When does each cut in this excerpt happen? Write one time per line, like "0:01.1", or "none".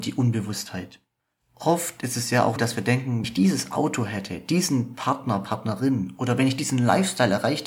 0:01.2
0:02.6
0:03.2